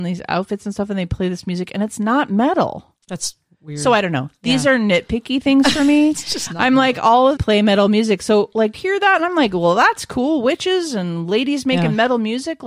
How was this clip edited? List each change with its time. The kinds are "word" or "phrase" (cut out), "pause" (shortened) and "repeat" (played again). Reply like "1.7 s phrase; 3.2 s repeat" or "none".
3.0 s pause; 7.4 s phrase; 8.7 s word